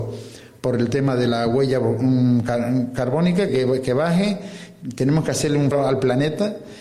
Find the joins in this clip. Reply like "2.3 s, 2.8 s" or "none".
3.5 s, 5.7 s